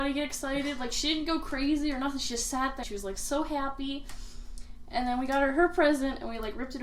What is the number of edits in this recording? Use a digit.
1